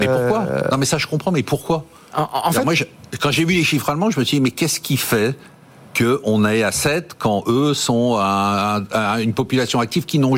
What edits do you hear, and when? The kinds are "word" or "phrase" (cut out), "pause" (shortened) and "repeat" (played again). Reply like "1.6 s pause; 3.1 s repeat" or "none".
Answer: none